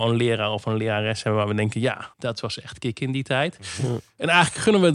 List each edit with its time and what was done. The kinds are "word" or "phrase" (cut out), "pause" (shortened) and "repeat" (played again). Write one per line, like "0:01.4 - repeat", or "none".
0:02.1 - pause